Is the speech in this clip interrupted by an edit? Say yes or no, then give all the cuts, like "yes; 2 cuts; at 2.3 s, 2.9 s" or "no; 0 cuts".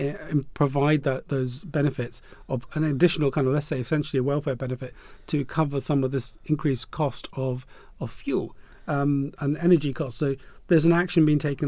no; 0 cuts